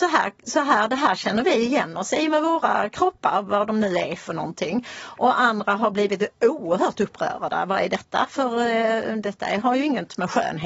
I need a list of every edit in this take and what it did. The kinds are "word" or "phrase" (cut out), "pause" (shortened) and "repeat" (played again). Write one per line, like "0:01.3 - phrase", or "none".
none